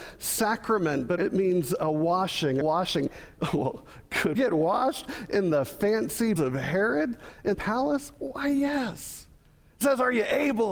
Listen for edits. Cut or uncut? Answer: cut